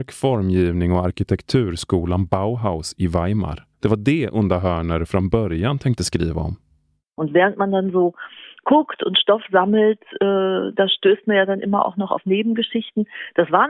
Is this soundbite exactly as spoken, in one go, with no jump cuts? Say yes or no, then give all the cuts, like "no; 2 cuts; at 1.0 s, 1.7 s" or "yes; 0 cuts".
no; 1 cut; at 3.7 s